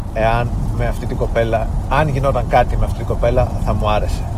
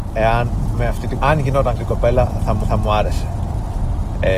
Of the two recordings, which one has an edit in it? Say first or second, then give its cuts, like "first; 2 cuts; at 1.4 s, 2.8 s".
second; 3 cuts; at 1.2 s, 1.8 s, 2.6 s